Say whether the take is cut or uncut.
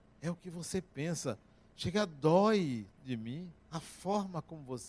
cut